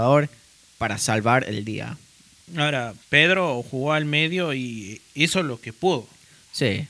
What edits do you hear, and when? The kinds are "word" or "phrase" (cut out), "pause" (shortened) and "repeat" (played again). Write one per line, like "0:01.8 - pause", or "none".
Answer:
0:03.0 - pause